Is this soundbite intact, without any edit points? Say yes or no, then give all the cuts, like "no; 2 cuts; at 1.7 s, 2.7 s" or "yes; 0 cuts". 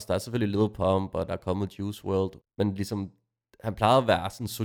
no; 1 cut; at 2.4 s